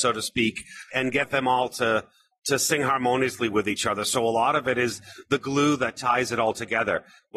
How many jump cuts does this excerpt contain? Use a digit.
0